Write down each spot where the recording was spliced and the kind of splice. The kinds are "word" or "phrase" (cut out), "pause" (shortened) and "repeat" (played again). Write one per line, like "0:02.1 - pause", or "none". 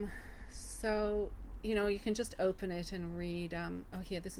none